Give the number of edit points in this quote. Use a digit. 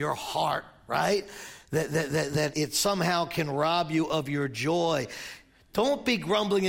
1